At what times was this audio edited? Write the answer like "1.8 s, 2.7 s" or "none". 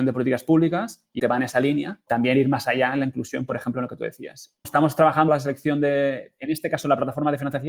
1.2 s, 2.1 s, 4.6 s, 5.3 s